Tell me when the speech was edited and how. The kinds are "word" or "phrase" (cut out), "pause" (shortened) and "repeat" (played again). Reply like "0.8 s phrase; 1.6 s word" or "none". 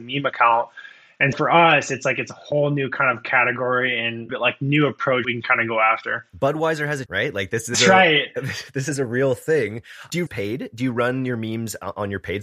1.3 s word; 4.3 s phrase; 5.2 s word; 6.3 s pause; 7.1 s phrase; 7.7 s word; 10.3 s phrase